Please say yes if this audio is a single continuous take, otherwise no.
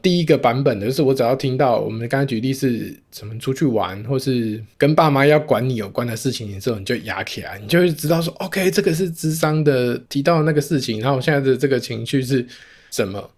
no